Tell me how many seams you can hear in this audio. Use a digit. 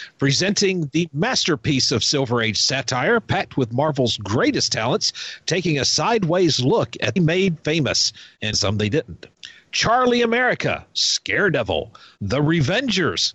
2